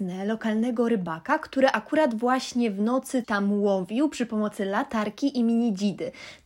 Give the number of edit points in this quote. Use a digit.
1